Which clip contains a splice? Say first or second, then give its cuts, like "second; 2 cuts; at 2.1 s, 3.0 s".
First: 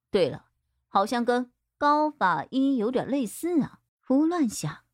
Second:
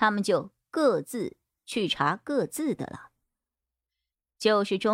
first; 1 cut; at 3.9 s